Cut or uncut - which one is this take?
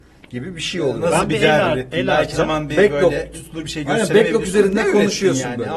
cut